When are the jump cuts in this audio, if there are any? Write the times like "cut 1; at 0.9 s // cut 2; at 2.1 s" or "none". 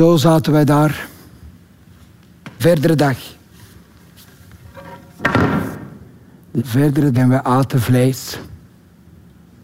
cut 1; at 2.6 s // cut 2; at 6.6 s // cut 3; at 7.1 s